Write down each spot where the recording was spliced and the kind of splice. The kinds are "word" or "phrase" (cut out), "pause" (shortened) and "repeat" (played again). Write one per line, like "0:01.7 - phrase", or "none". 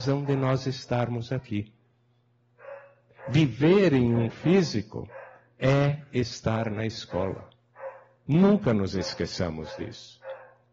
0:04.3 - word